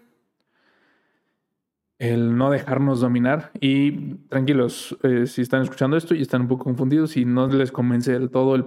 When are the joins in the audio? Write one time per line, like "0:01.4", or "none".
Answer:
none